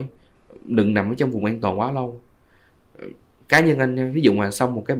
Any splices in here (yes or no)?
no